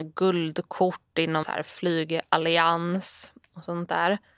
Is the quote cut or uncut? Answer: cut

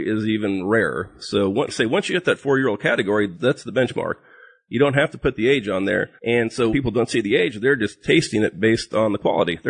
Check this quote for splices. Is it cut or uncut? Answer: cut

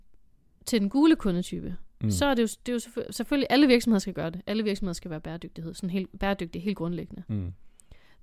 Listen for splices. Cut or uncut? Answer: uncut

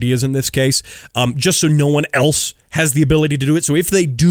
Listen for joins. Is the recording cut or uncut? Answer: uncut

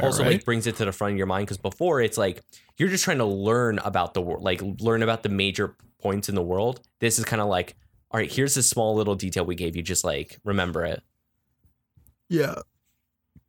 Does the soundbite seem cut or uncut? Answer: uncut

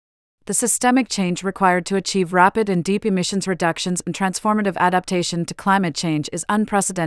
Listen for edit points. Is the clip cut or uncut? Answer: uncut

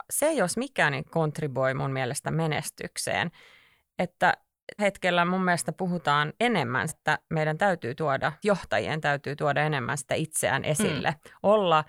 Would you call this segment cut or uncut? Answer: cut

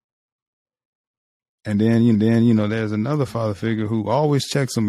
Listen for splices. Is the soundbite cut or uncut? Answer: cut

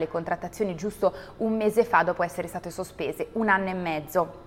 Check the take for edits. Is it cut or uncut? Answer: uncut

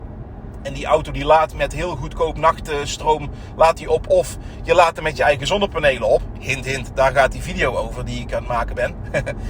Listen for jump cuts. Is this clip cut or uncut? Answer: uncut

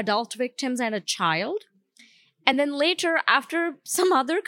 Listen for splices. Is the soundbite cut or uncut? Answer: uncut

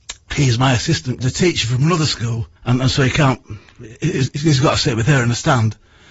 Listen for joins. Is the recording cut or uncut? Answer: cut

